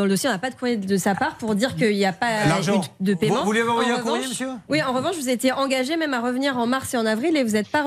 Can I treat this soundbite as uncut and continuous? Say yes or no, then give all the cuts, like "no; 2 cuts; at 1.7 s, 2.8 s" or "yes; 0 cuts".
yes; 0 cuts